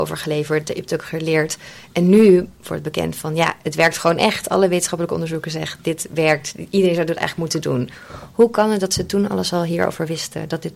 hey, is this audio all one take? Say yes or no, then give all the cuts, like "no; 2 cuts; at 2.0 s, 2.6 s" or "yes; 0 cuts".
yes; 0 cuts